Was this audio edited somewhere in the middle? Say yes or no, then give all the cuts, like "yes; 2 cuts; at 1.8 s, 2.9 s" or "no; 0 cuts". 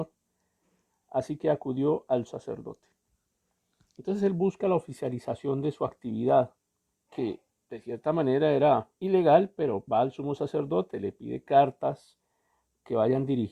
yes; 4 cuts; at 2.3 s, 6.9 s, 9.0 s, 9.9 s